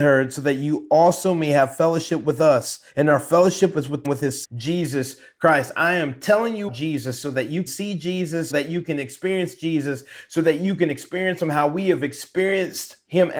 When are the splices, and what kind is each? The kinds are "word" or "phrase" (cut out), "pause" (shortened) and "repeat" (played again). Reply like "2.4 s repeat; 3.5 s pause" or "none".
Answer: 2.9 s pause; 4.0 s phrase; 4.4 s word; 6.7 s word; 7.7 s word; 8.5 s word